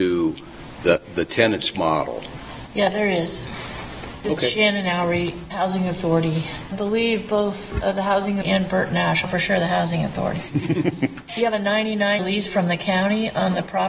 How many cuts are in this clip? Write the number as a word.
six